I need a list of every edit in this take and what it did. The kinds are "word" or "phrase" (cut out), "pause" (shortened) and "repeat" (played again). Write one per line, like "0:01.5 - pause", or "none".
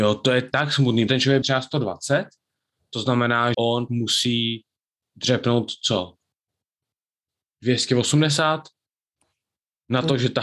0:01.1 - word
0:01.4 - word
0:03.5 - word
0:03.9 - word

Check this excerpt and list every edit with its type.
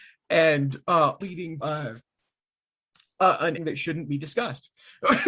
0:01.2 - word
0:01.6 - word
0:03.6 - word

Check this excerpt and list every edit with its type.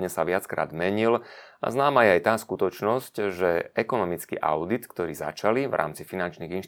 none

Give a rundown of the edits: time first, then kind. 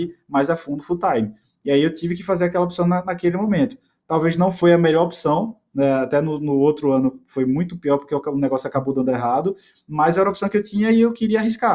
none

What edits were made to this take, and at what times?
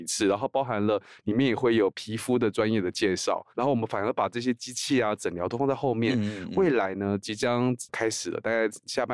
0:03.5 - pause

